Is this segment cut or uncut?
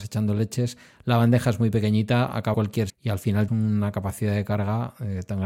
cut